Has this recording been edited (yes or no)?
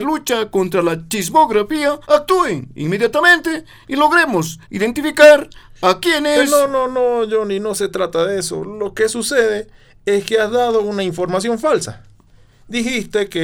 yes